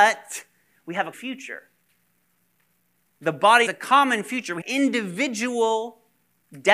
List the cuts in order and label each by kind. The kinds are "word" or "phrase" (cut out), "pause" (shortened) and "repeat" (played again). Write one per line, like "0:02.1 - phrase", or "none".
0:01.1 - word
0:03.7 - phrase
0:04.6 - word